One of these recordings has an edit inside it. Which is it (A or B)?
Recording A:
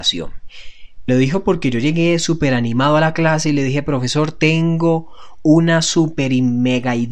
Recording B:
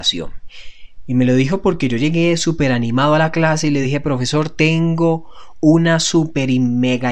A